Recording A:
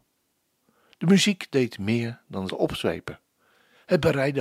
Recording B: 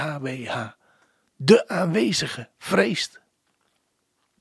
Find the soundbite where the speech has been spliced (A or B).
A